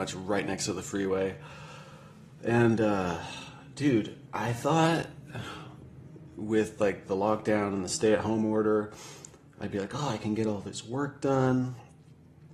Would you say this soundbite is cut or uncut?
uncut